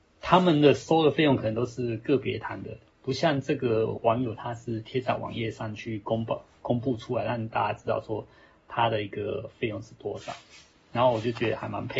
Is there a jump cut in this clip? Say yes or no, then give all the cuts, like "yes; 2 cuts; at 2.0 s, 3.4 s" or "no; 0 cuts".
no; 0 cuts